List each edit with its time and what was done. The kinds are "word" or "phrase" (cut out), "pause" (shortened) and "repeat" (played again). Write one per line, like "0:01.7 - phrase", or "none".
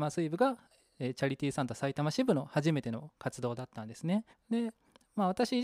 0:04.3 - pause